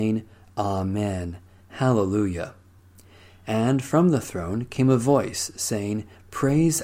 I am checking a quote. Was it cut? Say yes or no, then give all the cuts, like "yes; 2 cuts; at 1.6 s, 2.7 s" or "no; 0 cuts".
no; 0 cuts